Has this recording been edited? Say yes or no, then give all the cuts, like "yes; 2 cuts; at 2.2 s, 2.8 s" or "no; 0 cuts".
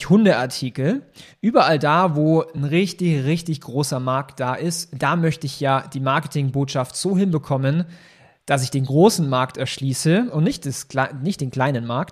no; 0 cuts